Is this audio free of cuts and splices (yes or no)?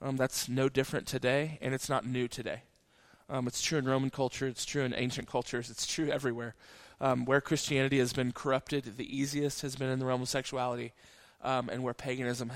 yes